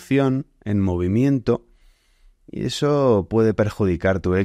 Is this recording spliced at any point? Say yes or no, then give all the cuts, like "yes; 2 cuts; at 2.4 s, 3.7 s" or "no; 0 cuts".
no; 0 cuts